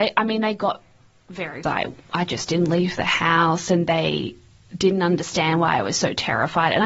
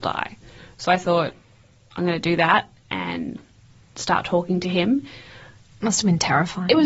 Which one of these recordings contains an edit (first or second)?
first